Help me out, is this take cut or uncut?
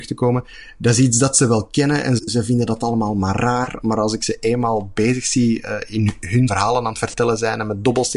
cut